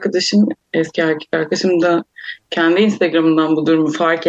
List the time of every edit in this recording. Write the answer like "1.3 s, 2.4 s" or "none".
none